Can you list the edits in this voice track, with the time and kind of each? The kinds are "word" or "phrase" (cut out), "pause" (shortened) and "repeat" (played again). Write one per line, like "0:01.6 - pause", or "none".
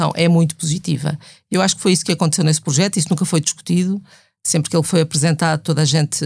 none

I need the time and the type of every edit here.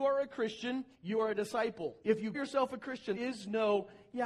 0:00.9 - pause
0:02.0 - pause
0:02.3 - word
0:03.1 - word

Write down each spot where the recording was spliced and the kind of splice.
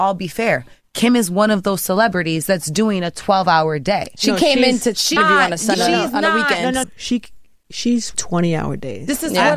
0:05.2 - word
0:05.7 - word
0:06.8 - word
0:08.1 - word

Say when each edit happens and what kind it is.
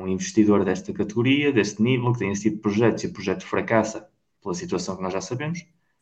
none

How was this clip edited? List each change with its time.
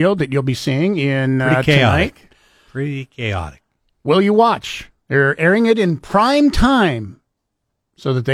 none

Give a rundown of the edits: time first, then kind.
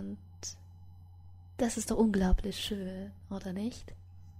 none

